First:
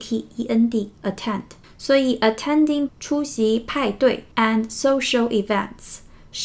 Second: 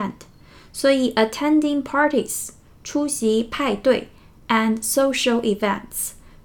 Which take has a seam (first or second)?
first